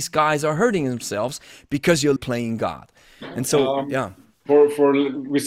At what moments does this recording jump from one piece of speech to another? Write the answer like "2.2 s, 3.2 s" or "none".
2.2 s